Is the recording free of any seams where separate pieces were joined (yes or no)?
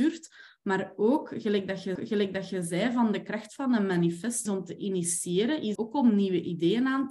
no